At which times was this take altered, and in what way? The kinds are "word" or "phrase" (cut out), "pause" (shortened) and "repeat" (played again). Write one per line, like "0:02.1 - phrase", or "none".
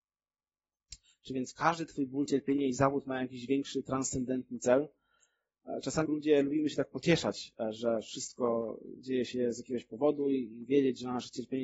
0:06.0 - word